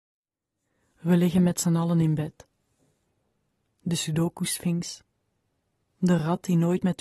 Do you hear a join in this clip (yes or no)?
no